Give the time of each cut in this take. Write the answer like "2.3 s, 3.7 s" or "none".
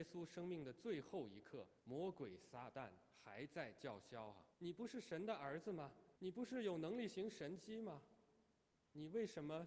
1.8 s, 4.5 s, 6.2 s